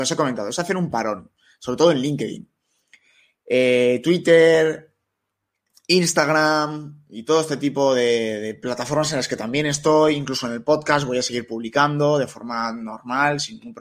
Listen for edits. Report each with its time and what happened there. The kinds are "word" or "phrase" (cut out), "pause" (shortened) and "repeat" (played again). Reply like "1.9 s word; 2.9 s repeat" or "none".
none